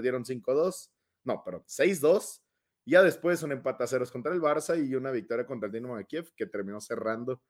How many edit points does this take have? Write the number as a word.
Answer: zero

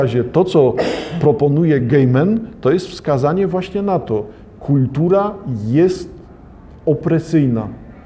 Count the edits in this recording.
zero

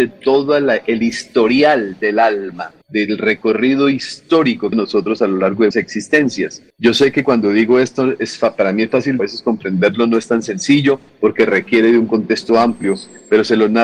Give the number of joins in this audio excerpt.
three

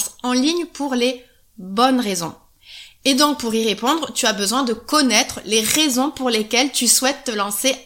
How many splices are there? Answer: zero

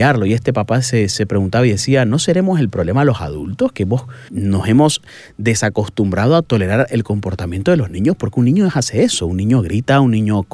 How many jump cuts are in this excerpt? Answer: one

